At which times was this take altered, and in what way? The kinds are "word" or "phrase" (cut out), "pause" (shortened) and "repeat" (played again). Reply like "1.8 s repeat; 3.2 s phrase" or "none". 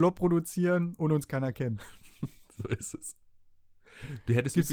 none